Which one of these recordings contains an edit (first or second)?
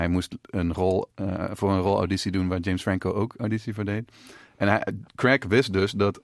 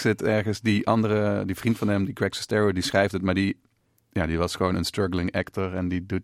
first